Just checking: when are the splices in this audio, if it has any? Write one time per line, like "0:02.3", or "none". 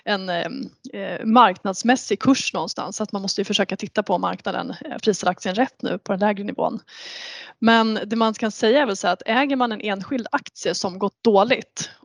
0:05.0